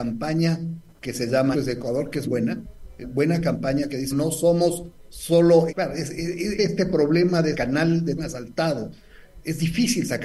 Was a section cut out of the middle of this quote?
yes; 8 cuts; at 1.5 s, 2.2 s, 3.0 s, 4.1 s, 5.7 s, 6.6 s, 7.5 s, 8.2 s

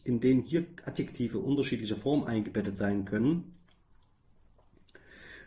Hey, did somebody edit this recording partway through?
no; 0 cuts

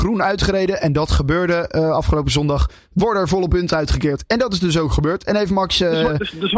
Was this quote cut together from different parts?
no; 0 cuts

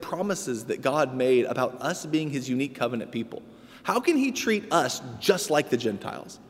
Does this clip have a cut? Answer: no; 0 cuts

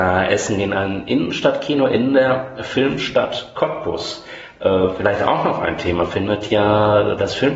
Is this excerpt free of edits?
yes; 0 cuts

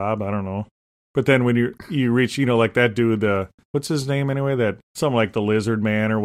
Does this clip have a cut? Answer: yes; 1 cut; at 4.8 s

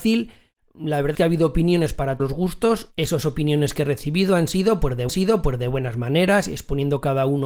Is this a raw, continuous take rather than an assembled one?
no; 4 cuts; at 1.1 s, 2.2 s, 3.2 s, 5.1 s

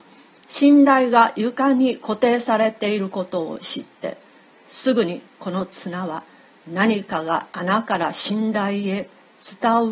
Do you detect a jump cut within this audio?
no; 0 cuts

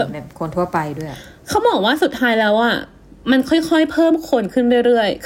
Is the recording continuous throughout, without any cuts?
yes; 0 cuts

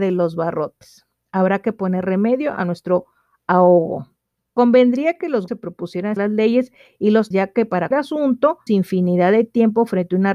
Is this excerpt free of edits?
no; 5 cuts; at 5.5 s, 6.2 s, 7.3 s, 7.9 s, 8.7 s

